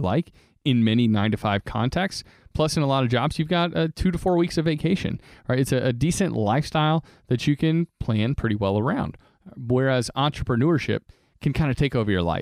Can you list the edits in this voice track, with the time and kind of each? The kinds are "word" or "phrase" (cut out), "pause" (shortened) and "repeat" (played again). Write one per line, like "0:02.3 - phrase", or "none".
none